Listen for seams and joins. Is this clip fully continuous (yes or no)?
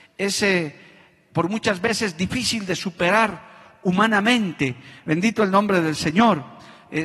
yes